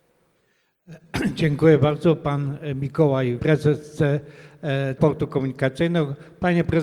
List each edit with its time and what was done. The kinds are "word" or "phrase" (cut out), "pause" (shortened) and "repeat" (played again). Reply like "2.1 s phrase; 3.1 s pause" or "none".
3.4 s word; 5.0 s word